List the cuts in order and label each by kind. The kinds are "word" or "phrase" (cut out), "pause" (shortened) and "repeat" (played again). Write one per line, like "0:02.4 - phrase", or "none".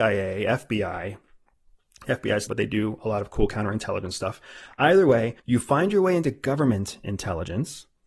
0:02.5 - phrase
0:05.4 - pause